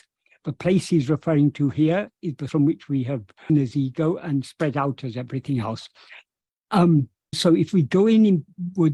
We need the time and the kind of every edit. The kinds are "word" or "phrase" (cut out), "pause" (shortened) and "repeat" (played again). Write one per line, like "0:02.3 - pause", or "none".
0:02.5 - word
0:03.5 - word
0:07.3 - word